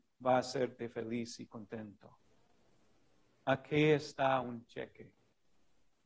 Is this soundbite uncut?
yes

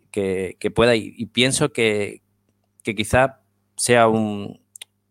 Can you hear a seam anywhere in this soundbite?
no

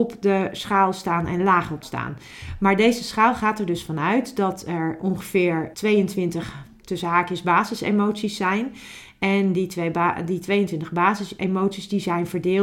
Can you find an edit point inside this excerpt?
yes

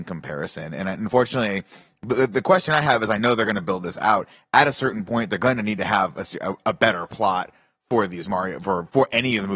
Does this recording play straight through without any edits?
yes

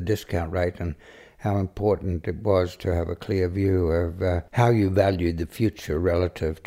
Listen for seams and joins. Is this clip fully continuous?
yes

